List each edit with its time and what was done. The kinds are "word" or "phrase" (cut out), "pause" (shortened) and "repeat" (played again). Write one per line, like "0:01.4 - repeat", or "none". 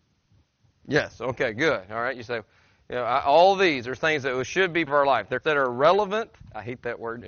0:04.9 - word
0:05.4 - word

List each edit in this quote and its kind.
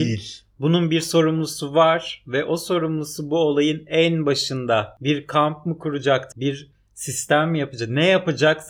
0:06.3 - word

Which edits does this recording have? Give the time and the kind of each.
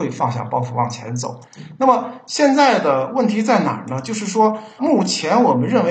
0:04.8 - word

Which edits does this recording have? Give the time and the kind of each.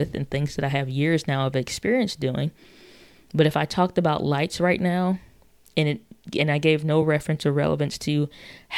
none

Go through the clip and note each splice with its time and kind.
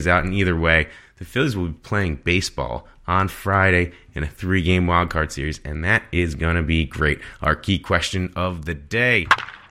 none

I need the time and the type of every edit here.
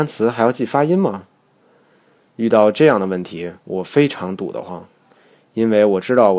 0:03.6 - pause

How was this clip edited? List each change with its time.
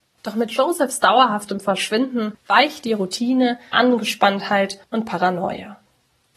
0:03.7 - word
0:04.8 - pause

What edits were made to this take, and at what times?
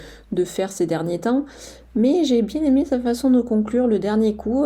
none

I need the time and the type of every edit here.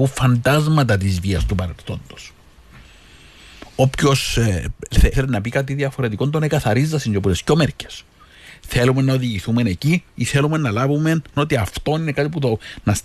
0:05.1 - word
0:10.1 - pause
0:11.4 - word

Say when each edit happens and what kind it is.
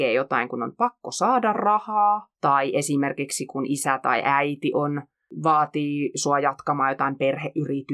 none

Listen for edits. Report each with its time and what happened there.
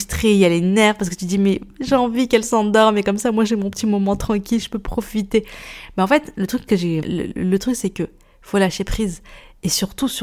0:07.0 - word

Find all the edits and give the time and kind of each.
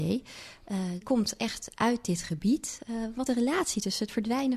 0:01.0 - word
0:03.3 - word

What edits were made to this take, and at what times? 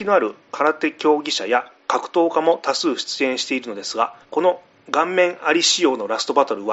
0:04.2 - pause

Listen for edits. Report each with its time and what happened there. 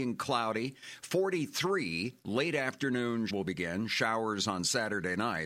0:03.3 - word

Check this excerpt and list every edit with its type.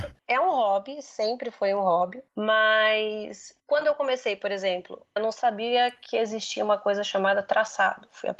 0:03.6 - pause
0:05.2 - word

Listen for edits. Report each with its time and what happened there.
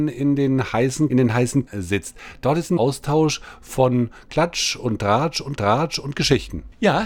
0:01.1 - phrase
0:01.7 - word
0:02.8 - word
0:05.6 - repeat

